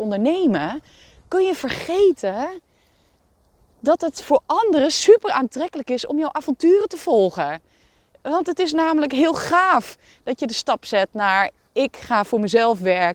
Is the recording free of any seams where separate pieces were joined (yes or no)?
yes